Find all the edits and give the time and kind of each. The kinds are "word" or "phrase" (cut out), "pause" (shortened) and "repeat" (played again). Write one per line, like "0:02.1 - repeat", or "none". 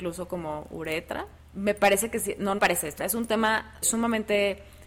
0:01.4 - pause
0:02.6 - word
0:03.0 - word
0:03.8 - word